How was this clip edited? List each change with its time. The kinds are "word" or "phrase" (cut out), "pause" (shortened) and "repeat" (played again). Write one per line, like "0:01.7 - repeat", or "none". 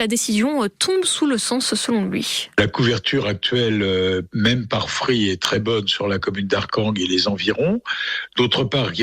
none